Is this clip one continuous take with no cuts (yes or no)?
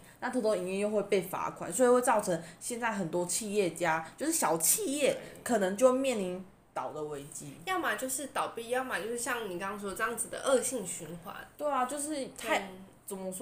yes